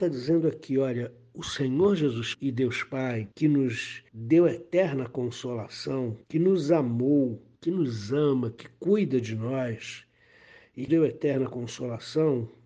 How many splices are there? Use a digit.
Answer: 6